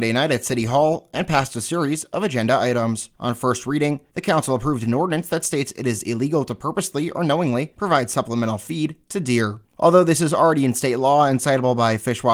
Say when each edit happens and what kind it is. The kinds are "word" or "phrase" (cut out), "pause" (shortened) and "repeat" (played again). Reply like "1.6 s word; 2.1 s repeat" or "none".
none